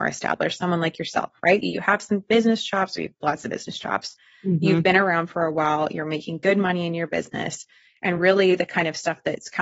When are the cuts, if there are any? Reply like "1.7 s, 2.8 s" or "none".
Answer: none